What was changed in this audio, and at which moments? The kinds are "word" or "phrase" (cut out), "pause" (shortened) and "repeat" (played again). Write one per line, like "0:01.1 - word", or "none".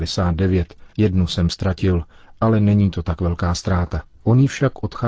0:00.9 - pause
0:04.1 - pause

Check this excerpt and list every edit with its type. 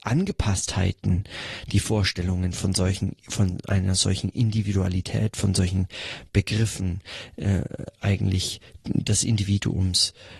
0:03.2 - pause

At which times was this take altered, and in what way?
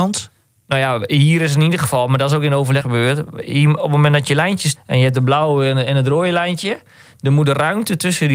0:02.8 - phrase
0:04.8 - word

